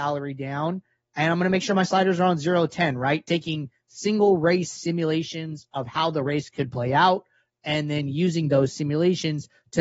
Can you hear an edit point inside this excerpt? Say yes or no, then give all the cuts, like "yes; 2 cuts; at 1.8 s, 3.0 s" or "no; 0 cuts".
no; 0 cuts